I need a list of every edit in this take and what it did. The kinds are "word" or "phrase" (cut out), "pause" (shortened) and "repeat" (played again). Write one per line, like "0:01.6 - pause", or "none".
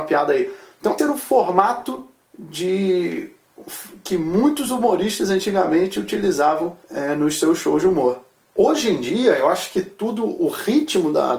0:01.0 - word
0:02.3 - pause
0:06.8 - pause
0:08.4 - pause